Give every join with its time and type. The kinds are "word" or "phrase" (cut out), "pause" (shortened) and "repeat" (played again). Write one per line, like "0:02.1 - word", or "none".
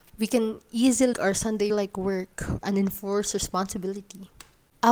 0:01.1 - word
0:01.7 - phrase
0:02.6 - word